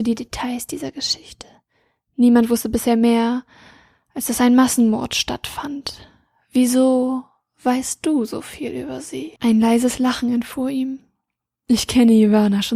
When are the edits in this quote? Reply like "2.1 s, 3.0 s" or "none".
9.4 s